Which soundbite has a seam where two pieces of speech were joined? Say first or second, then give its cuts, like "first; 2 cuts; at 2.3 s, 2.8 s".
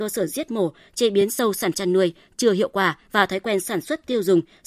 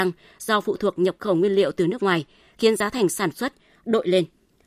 first; 2 cuts; at 1.7 s, 3.0 s